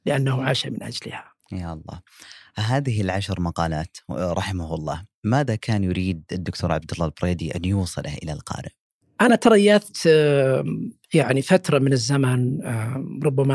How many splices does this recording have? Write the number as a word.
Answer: zero